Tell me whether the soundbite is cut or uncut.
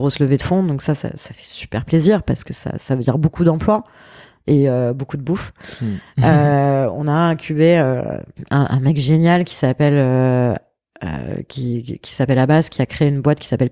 uncut